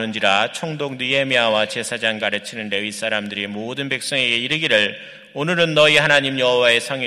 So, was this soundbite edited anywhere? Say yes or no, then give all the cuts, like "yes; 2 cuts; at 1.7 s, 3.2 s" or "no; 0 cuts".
yes; 1 cut; at 2.2 s